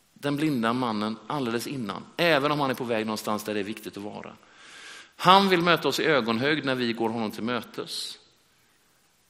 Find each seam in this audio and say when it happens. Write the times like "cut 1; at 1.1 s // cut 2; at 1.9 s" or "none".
none